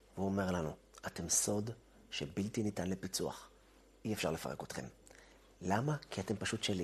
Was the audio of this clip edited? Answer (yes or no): no